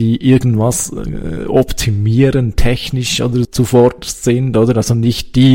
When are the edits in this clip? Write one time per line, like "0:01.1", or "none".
0:03.4